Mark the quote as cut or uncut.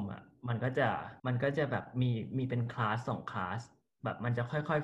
cut